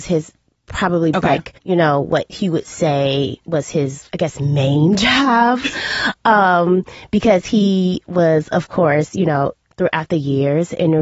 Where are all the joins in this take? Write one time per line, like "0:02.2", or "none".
0:01.1
0:01.6
0:04.1